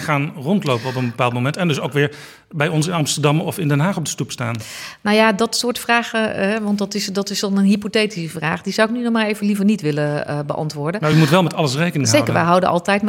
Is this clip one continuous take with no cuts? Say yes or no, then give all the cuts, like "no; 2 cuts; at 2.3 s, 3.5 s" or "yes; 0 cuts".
yes; 0 cuts